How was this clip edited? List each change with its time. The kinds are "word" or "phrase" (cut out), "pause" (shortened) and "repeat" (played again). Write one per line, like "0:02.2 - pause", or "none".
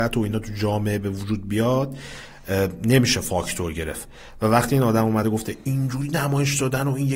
none